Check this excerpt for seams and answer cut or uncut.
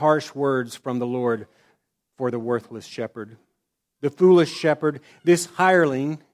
uncut